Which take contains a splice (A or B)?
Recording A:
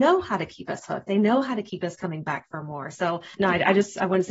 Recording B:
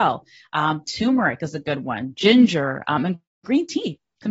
A